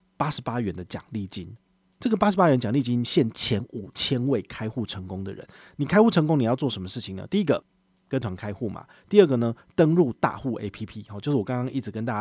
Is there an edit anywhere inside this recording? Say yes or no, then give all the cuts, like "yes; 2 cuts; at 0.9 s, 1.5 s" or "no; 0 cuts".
no; 0 cuts